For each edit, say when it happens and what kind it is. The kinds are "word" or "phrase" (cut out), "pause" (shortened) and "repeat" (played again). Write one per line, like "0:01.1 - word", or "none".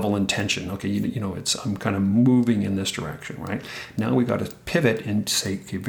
none